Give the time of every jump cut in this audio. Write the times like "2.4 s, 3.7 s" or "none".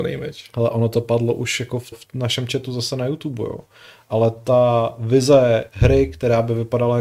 1.9 s